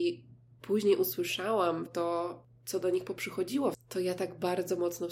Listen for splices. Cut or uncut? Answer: cut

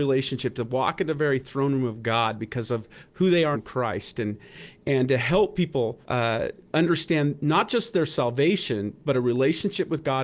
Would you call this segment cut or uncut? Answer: cut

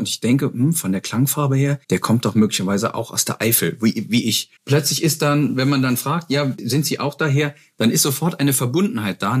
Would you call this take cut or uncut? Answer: cut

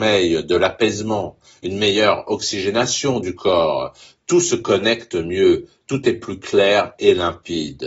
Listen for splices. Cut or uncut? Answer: uncut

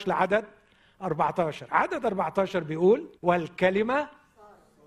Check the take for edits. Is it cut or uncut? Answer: cut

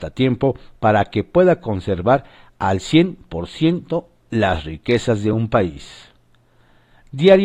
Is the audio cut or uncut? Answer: uncut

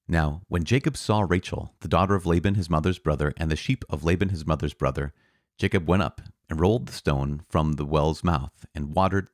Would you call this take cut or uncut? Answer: uncut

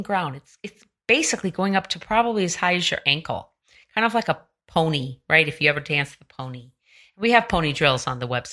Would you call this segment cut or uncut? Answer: uncut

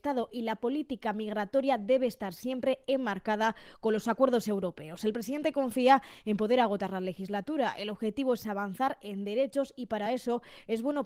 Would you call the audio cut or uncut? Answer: uncut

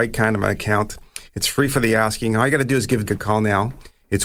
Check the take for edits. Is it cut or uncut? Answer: cut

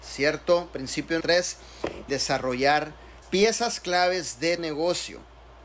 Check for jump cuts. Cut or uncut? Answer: cut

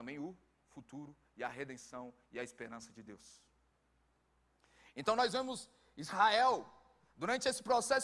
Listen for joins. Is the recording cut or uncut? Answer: uncut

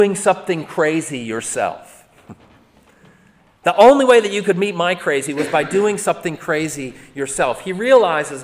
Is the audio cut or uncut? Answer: uncut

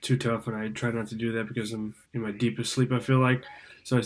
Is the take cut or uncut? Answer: cut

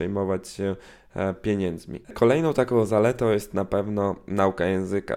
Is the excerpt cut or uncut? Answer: cut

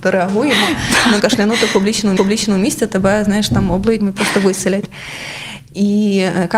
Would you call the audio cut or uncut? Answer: cut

